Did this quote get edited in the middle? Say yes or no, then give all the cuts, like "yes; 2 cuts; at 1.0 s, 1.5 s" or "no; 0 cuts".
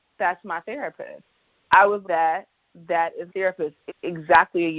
yes; 3 cuts; at 2.0 s, 3.3 s, 3.9 s